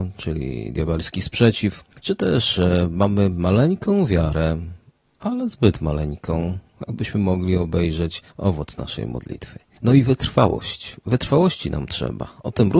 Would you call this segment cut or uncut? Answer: cut